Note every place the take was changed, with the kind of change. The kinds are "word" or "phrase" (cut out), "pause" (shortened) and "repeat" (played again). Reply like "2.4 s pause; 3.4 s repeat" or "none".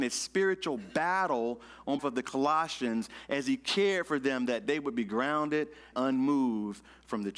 2.0 s word; 5.9 s word